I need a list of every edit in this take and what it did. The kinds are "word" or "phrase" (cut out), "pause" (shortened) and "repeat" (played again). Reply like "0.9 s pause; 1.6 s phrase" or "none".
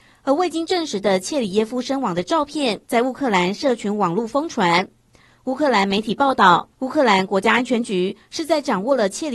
2.8 s pause; 6.7 s pause

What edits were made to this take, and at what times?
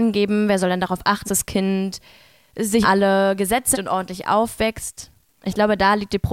1.2 s word; 2.8 s word; 3.7 s word

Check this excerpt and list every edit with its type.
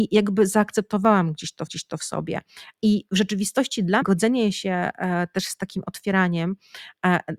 1.7 s repeat; 4.0 s word

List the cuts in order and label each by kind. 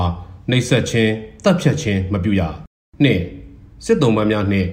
2.8 s pause

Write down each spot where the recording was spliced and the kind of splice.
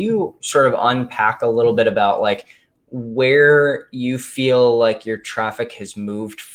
none

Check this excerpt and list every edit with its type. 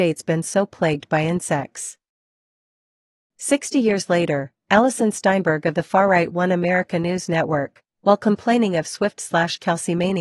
none

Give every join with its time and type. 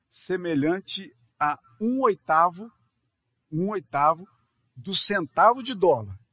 none

